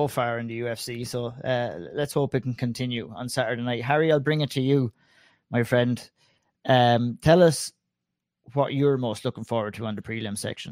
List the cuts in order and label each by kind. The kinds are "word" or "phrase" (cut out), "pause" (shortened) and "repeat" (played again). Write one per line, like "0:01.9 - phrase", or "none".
none